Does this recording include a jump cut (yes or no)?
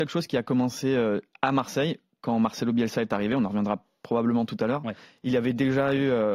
no